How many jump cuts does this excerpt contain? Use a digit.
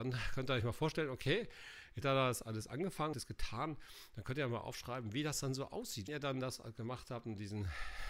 3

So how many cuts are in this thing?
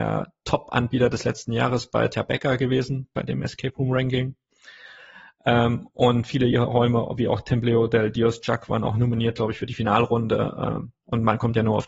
0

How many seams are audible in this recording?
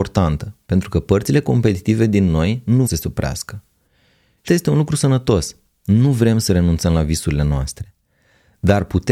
2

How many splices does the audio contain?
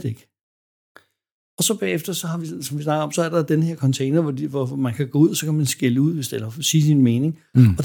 0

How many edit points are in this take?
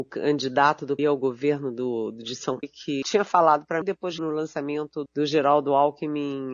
6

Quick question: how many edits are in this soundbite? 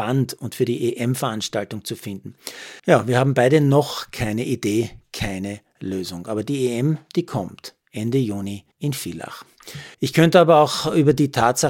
3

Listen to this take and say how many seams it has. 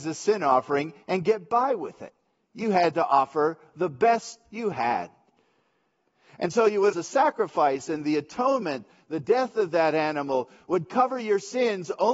1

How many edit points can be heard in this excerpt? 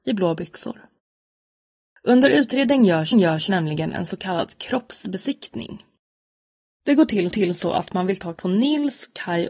3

